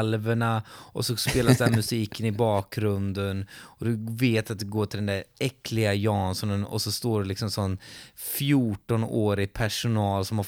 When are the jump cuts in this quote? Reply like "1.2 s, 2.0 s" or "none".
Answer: none